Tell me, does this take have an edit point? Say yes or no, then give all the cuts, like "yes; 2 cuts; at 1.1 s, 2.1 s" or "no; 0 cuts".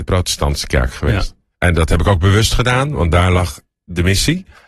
yes; 1 cut; at 1.5 s